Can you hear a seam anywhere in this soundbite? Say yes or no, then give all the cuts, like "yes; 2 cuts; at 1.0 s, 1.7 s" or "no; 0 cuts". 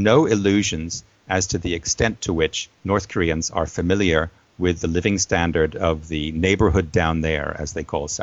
yes; 1 cut; at 2.7 s